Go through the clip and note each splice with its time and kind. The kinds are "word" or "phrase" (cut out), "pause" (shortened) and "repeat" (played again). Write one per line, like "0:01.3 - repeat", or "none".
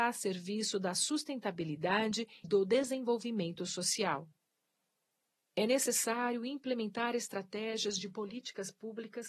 0:02.4 - word